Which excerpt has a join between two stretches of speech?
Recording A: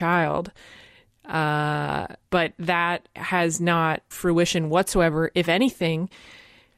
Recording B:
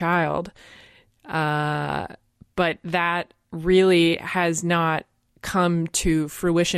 A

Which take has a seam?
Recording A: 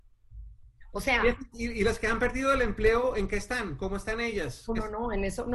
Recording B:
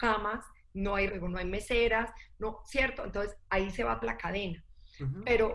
B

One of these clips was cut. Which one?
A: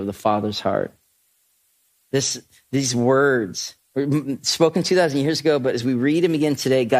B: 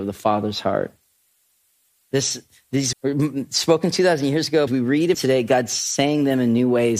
B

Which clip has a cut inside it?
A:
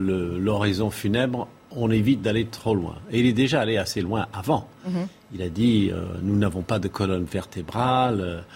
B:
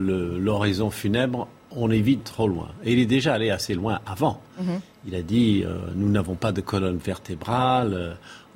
B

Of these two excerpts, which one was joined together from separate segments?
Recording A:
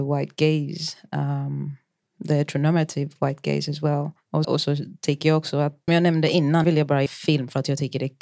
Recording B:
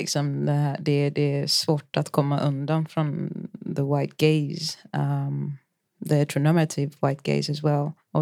A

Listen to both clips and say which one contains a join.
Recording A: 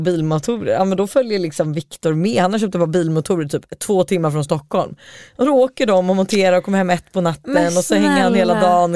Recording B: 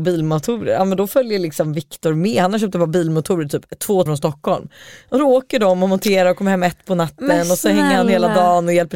B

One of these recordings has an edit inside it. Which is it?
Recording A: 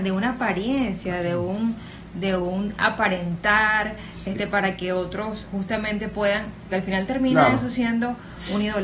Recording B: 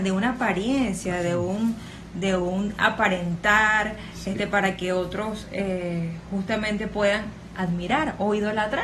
A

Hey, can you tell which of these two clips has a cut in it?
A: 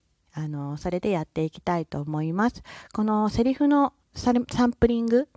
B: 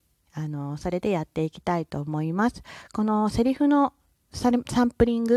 A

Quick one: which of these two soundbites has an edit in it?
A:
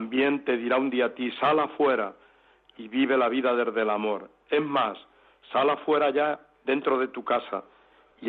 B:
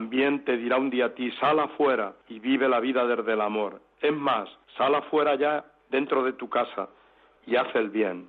B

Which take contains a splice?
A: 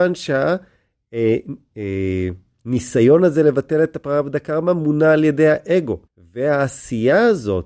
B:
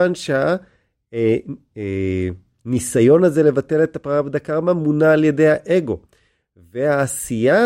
A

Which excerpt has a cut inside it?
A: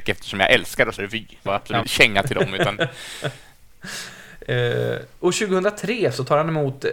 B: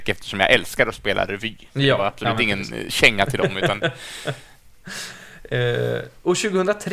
A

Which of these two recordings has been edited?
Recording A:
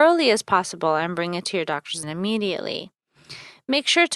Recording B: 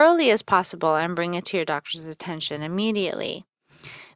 A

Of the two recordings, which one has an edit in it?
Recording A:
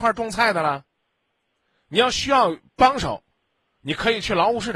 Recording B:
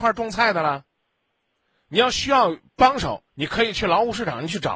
B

